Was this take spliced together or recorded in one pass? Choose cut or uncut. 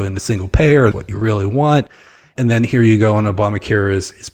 cut